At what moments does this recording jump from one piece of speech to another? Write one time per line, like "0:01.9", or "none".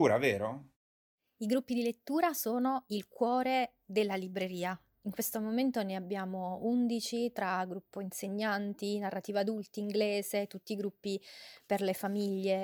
none